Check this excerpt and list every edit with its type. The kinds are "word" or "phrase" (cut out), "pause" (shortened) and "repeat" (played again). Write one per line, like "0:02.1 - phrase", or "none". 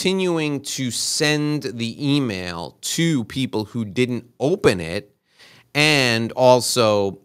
none